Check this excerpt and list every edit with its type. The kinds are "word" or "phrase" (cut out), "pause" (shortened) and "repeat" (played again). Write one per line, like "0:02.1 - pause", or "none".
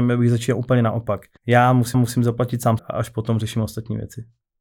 0:01.4 - pause
0:01.9 - repeat
0:02.8 - word